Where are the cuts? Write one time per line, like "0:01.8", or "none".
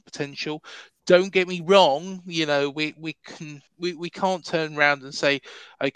0:03.7